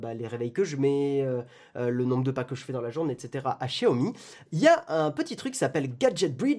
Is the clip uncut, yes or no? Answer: yes